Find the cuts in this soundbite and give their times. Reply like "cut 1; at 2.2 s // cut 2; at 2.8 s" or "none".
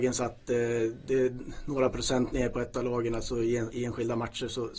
cut 1; at 3.7 s